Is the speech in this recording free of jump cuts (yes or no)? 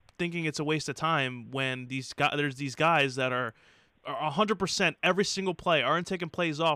yes